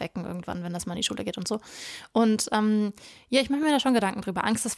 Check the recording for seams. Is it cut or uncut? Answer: uncut